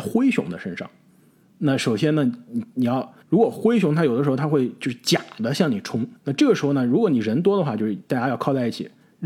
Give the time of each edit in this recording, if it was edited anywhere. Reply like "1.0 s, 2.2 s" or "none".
3.2 s, 6.2 s